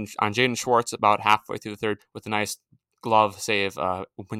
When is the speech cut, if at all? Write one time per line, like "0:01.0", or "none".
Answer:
0:02.0